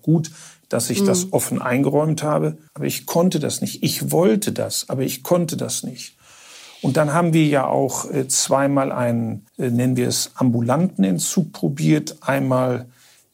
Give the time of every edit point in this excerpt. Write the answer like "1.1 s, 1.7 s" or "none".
2.7 s, 9.5 s